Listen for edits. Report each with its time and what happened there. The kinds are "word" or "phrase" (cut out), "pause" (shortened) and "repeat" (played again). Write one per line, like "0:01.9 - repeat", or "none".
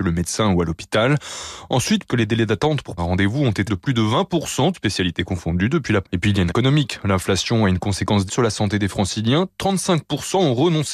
0:02.1 - word
0:03.0 - word
0:03.7 - word
0:04.7 - word
0:06.0 - word
0:06.5 - word
0:08.3 - word